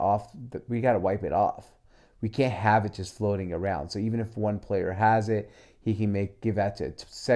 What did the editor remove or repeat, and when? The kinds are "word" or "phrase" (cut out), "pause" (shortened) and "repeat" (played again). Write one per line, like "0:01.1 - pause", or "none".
none